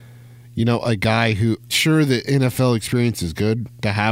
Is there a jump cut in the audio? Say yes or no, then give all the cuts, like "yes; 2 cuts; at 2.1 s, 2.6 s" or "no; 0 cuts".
yes; 1 cut; at 1.7 s